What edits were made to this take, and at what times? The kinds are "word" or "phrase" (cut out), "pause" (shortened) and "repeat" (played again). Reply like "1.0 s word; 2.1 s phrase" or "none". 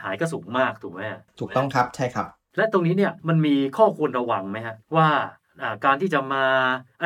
3.2 s pause; 4.8 s pause